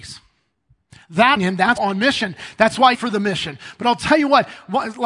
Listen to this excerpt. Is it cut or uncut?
cut